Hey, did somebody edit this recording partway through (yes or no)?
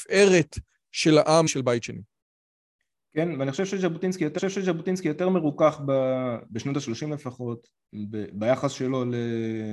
yes